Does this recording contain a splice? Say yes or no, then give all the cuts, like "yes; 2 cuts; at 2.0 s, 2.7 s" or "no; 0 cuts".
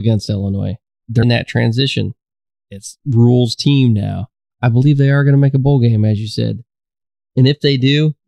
yes; 1 cut; at 1.2 s